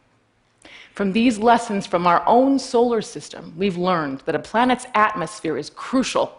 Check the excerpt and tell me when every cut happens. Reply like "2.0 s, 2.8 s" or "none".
none